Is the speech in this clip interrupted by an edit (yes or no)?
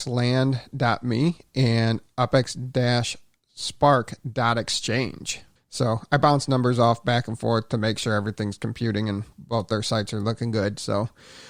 yes